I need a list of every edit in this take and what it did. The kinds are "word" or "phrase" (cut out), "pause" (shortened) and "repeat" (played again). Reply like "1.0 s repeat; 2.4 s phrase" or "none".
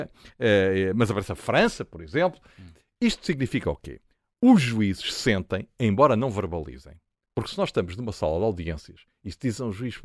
none